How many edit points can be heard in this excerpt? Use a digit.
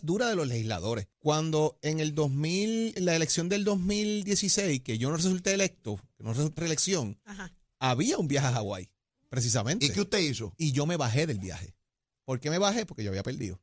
3